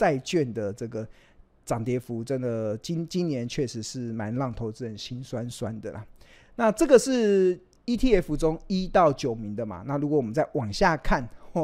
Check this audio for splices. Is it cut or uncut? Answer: uncut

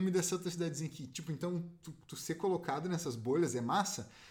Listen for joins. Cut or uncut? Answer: uncut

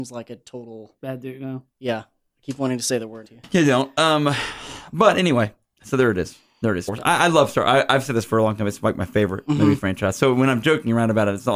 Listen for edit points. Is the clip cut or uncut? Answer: cut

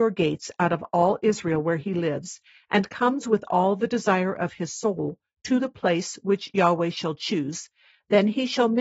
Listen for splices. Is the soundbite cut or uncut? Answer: uncut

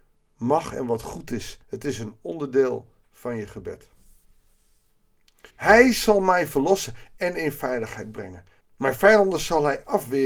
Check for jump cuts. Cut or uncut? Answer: cut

